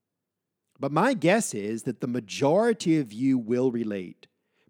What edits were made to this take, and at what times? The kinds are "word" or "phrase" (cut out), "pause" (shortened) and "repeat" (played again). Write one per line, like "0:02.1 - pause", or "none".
none